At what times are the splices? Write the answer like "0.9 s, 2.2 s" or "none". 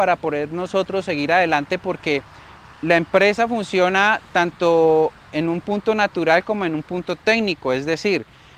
none